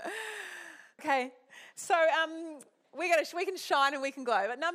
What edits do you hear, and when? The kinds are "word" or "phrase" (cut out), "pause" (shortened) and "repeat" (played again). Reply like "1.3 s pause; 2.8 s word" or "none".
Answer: 1.0 s word; 2.8 s pause